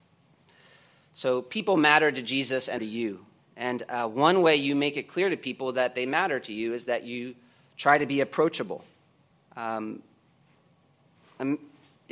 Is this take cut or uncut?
cut